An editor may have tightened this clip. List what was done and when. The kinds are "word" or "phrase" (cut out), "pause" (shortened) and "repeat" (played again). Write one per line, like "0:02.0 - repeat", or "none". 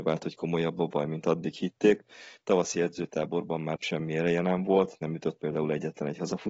0:03.8 - word